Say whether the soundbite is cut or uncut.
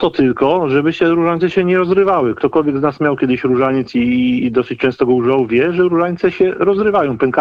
uncut